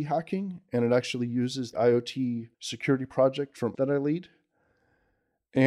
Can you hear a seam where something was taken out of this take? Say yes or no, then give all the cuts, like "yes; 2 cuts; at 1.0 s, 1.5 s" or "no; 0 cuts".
yes; 3 cuts; at 1.7 s, 2.5 s, 3.7 s